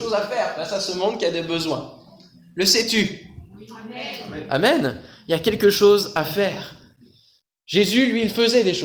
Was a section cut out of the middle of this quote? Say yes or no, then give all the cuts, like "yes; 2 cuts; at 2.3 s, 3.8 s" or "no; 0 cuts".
no; 0 cuts